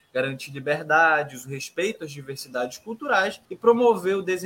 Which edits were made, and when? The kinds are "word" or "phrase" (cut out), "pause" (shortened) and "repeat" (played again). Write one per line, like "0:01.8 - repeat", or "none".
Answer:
0:03.5 - pause